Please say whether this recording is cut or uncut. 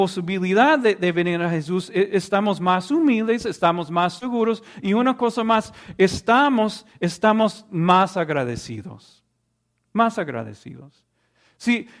uncut